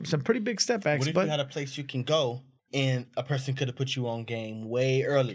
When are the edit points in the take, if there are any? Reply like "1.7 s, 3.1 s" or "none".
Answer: 2.6 s